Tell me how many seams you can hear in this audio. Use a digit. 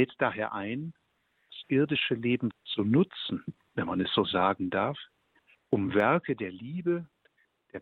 1